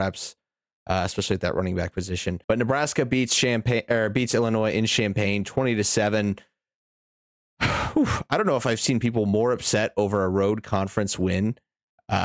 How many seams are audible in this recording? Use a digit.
1